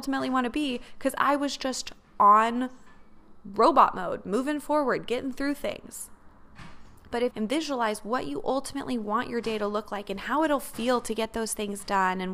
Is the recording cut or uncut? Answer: cut